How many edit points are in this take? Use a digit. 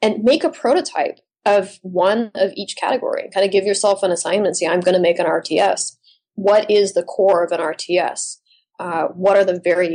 0